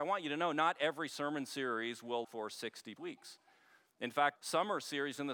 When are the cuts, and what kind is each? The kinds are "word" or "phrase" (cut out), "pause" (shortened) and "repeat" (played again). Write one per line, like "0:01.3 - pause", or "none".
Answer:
0:02.2 - word
0:03.0 - word
0:04.4 - word